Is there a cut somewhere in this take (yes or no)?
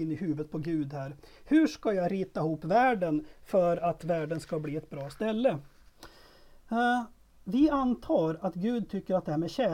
no